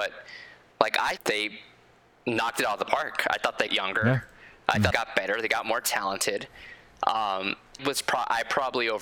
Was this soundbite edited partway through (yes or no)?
yes